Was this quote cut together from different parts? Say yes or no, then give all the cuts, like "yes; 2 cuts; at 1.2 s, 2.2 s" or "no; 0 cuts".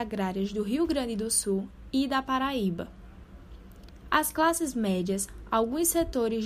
no; 0 cuts